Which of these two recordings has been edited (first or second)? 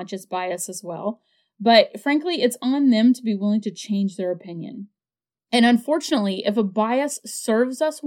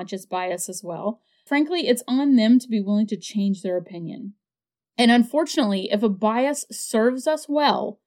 second